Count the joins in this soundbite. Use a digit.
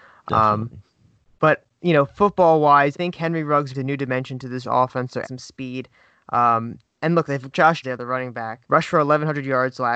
7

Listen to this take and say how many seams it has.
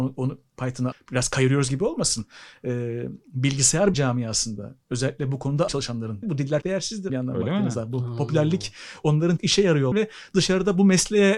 8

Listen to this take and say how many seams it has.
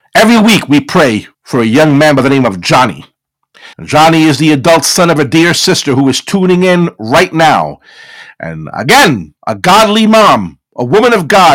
3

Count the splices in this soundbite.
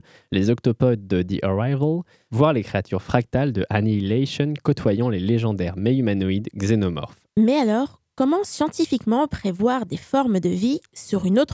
0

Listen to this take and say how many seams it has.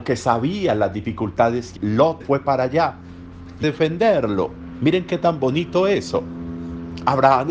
3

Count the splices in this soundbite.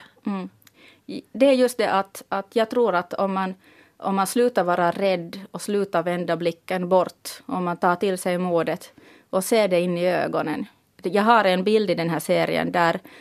0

